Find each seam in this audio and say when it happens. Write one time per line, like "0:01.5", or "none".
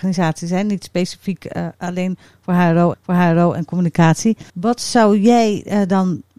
0:01.7
0:02.9
0:04.5